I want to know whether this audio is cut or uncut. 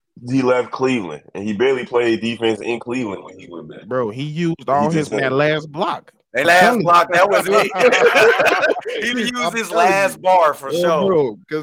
cut